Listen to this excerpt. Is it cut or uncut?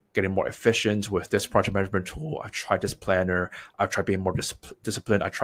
uncut